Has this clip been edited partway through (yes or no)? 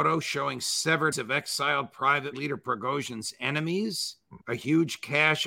yes